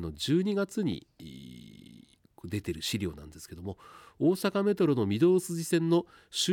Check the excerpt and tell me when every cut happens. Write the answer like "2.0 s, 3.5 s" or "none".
2.2 s